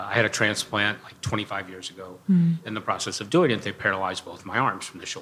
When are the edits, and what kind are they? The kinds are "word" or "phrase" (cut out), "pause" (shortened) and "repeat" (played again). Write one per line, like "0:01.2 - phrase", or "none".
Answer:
none